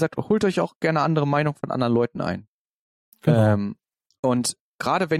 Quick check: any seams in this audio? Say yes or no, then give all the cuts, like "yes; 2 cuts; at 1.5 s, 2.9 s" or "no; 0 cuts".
no; 0 cuts